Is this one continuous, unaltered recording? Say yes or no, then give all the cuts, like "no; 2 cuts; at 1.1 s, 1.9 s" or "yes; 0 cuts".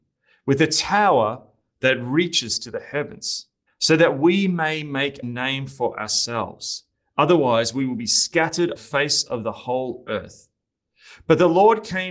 no; 3 cuts; at 3.7 s, 5.2 s, 8.8 s